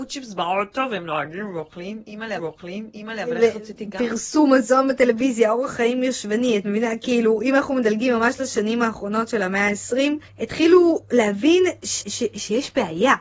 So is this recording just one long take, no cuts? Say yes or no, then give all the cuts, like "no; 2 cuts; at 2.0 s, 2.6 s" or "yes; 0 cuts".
no; 3 cuts; at 2.4 s, 10.3 s, 12.0 s